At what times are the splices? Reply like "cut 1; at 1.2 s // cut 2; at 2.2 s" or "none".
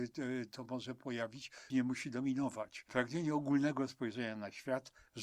cut 1; at 1.7 s

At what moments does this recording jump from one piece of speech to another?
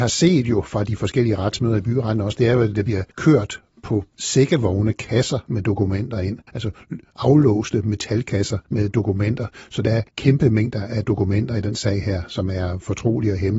cut 1; at 3.1 s // cut 2; at 4.1 s // cut 3; at 6.5 s // cut 4; at 8.7 s // cut 5; at 10.1 s

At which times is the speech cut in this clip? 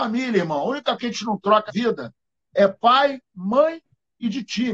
cut 1; at 1.0 s // cut 2; at 1.7 s

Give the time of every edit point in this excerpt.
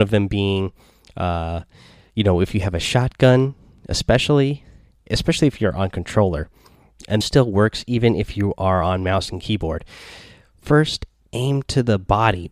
cut 1; at 5.1 s // cut 2; at 7.2 s

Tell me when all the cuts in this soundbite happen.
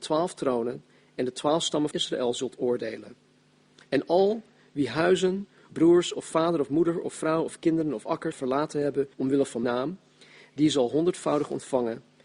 cut 1; at 1.9 s // cut 2; at 5.7 s // cut 3; at 6.2 s // cut 4; at 8.3 s // cut 5; at 9.1 s // cut 6; at 9.6 s

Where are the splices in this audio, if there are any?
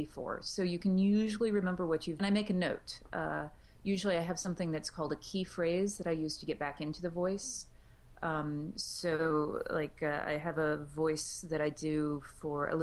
cut 1; at 2.2 s

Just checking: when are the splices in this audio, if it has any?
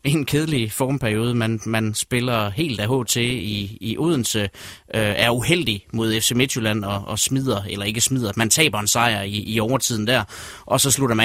none

